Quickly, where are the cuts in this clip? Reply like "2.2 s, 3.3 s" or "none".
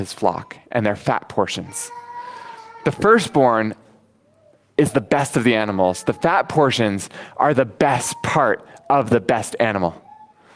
none